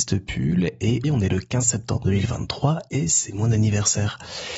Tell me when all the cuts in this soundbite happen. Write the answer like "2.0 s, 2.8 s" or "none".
1.0 s